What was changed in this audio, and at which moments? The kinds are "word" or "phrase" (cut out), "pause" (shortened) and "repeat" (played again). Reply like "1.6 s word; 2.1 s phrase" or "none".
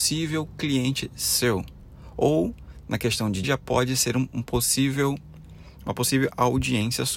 3.4 s phrase